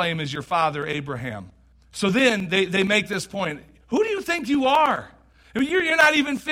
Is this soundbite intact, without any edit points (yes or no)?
no